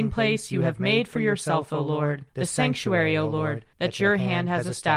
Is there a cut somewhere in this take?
yes; 2 cuts; at 2.3 s, 3.7 s

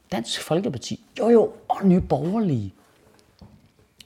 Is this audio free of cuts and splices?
yes; 0 cuts

